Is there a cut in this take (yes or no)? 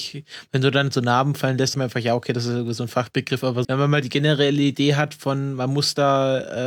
yes